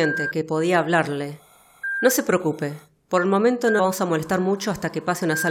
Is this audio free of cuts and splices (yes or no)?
no